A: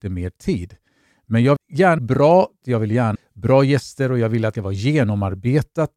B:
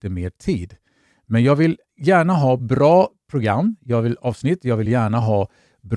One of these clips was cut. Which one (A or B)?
A